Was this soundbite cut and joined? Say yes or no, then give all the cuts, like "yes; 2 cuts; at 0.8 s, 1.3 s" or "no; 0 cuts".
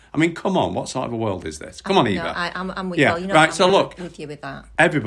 no; 0 cuts